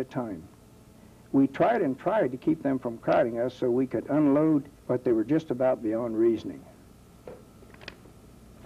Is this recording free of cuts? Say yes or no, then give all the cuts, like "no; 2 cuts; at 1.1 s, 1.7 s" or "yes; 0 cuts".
no; 1 cut; at 4.8 s